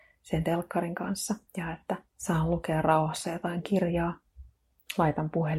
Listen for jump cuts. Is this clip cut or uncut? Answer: cut